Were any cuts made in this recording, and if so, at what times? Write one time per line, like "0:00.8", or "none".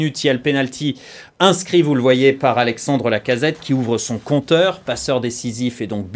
none

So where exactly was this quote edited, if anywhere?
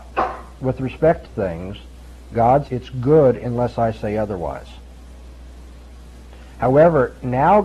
0:01.2
0:02.7

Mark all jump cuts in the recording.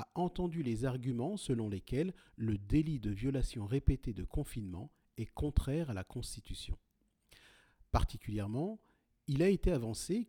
none

